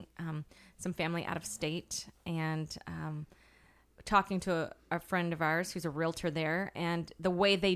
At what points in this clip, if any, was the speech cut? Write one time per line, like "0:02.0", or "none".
none